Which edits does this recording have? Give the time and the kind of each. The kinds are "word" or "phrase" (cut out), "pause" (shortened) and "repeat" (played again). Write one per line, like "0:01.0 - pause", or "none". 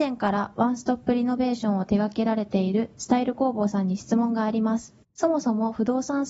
0:05.0 - pause